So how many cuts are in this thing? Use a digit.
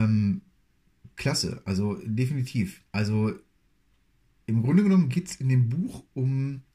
1